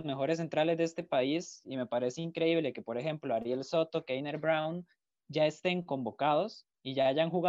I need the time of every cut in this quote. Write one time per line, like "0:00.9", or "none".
none